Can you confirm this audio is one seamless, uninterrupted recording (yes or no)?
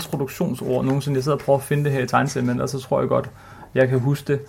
yes